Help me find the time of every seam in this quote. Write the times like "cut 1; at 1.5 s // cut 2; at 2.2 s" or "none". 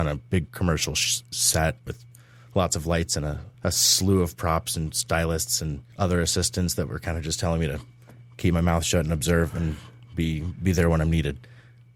cut 1; at 1.9 s // cut 2; at 3.5 s // cut 3; at 5.9 s